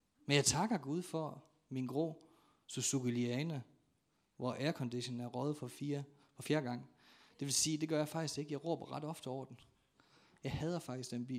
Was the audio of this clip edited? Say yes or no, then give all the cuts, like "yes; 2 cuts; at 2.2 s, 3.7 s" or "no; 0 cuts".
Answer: no; 0 cuts